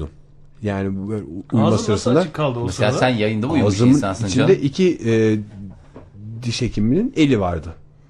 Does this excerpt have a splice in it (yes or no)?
no